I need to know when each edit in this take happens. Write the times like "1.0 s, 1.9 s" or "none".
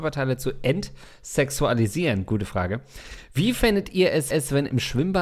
4.3 s